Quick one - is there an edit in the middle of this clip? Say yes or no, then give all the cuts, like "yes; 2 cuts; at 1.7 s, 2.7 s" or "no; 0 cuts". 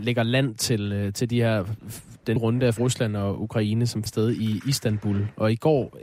yes; 3 cuts; at 2.4 s, 2.8 s, 4.1 s